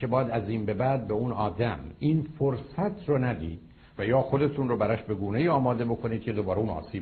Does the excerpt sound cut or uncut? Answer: uncut